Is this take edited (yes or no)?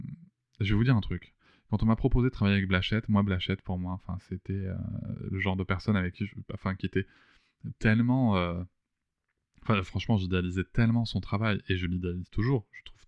no